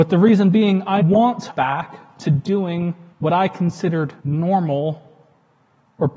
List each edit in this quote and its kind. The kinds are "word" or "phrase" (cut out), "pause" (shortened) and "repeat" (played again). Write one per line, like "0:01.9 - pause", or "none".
0:01.0 - word
0:01.5 - word
0:03.1 - pause
0:04.2 - pause